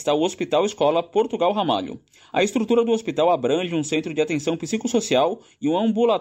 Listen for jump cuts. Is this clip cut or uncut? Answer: uncut